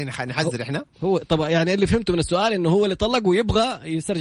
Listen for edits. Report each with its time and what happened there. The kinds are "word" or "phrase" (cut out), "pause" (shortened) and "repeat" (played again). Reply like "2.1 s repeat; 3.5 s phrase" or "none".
none